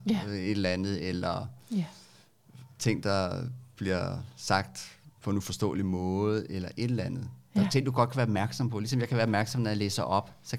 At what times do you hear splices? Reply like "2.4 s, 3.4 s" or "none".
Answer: 5.1 s